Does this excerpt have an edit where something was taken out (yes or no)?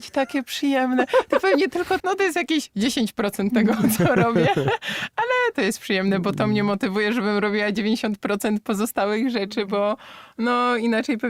yes